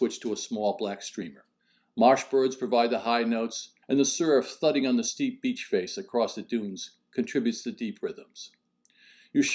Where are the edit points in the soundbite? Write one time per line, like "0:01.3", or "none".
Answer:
0:01.6
0:03.8